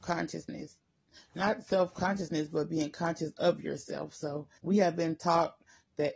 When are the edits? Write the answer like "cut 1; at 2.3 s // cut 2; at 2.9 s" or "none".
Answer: cut 1; at 4.6 s